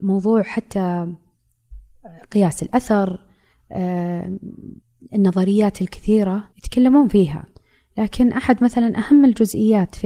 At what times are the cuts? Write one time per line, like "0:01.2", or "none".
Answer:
0:04.8
0:06.5
0:07.5